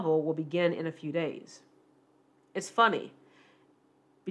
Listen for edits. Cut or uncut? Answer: uncut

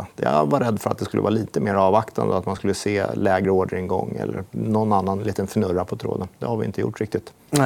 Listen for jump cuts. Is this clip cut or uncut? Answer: uncut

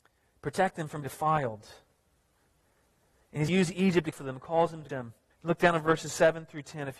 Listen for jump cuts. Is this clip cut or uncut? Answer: cut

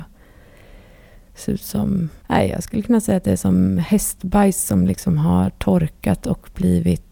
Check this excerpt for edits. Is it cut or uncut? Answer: cut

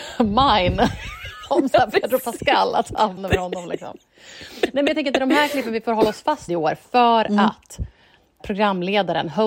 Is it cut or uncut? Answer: cut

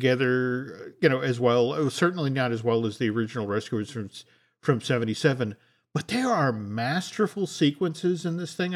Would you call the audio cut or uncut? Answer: uncut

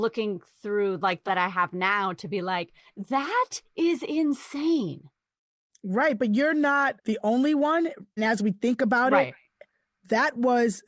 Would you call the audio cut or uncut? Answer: cut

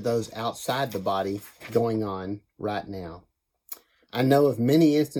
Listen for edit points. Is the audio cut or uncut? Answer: uncut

